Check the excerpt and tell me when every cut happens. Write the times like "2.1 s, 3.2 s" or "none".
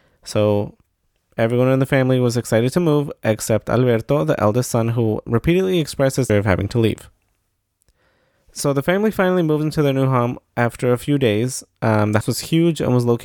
5.3 s, 6.3 s, 12.2 s